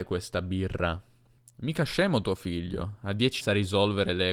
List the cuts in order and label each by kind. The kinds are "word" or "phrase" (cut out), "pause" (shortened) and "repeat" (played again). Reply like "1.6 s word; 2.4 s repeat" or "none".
1.4 s pause; 3.4 s word